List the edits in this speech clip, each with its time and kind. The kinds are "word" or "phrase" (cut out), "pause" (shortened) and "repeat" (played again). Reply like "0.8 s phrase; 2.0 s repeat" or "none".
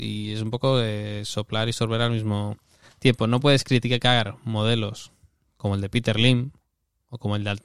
none